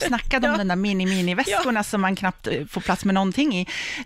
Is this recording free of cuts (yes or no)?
yes